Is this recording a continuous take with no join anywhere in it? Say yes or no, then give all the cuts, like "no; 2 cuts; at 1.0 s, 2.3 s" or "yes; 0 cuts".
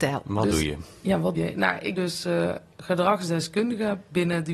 no; 2 cuts; at 1.3 s, 2.0 s